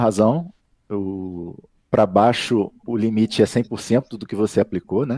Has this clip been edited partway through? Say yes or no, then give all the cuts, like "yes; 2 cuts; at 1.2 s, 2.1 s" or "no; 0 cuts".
no; 0 cuts